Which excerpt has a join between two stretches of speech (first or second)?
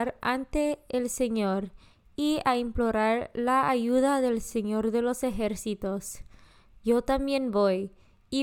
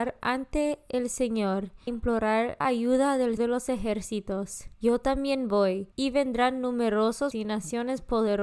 second